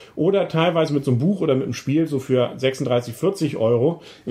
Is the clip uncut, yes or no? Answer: yes